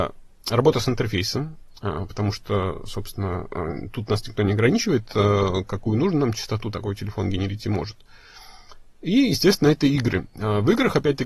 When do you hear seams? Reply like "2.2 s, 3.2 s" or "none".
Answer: none